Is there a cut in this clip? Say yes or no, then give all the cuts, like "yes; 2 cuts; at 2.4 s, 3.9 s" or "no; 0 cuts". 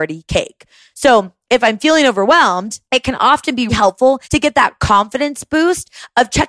yes; 3 cuts; at 2.9 s, 3.7 s, 4.2 s